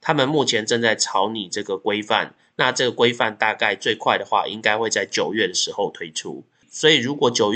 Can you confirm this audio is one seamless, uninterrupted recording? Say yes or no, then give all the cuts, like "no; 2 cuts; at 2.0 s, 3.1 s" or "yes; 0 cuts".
yes; 0 cuts